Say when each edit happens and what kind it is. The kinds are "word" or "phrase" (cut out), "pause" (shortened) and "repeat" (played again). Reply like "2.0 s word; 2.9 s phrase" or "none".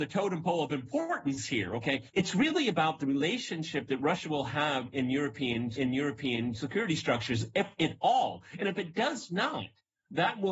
2.1 s pause; 5.7 s repeat